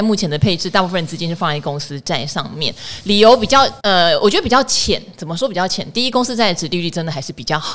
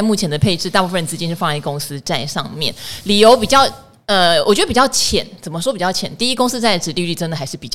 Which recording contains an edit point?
first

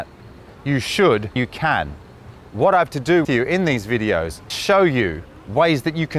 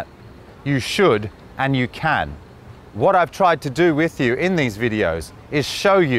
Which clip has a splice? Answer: first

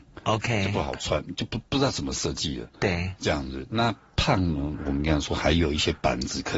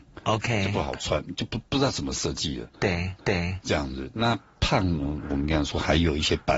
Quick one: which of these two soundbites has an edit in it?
second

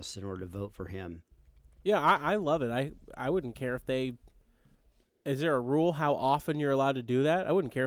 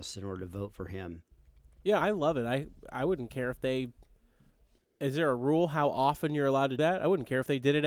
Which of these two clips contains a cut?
second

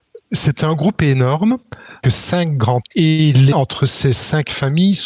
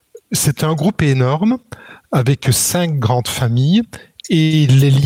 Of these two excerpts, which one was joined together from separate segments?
first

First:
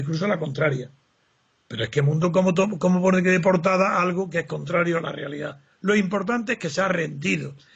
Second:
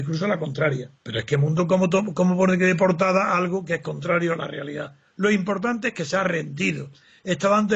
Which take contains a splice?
second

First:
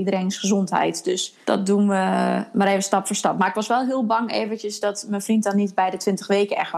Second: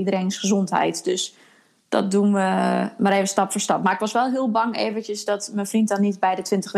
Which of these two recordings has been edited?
first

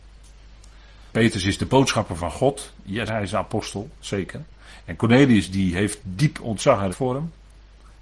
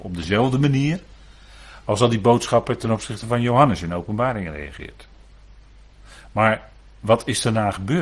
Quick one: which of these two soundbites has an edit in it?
first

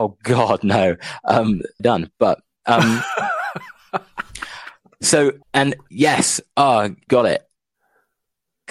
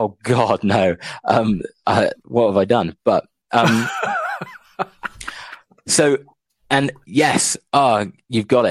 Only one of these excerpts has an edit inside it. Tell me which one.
first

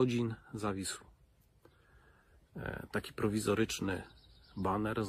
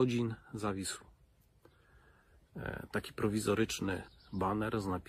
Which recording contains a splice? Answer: second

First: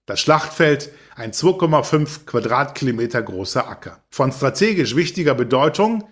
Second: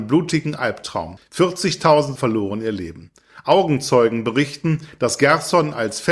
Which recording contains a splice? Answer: second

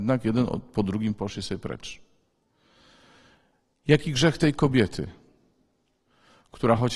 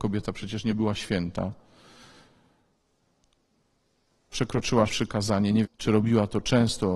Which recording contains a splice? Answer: second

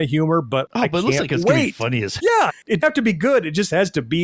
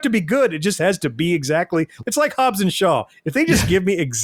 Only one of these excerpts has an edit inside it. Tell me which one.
first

